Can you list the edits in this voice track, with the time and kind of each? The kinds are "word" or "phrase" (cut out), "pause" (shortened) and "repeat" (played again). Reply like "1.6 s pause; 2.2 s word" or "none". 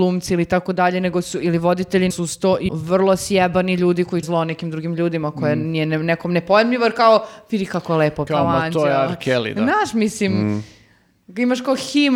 2.1 s word; 2.7 s word; 4.2 s word; 8.3 s word